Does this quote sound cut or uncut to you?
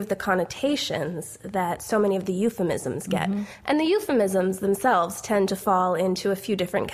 uncut